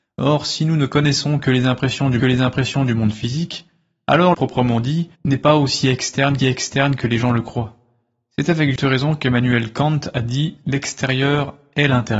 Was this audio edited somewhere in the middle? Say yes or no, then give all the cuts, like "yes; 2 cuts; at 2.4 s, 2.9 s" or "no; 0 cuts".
yes; 5 cuts; at 2.2 s, 4.3 s, 5.1 s, 6.4 s, 8.8 s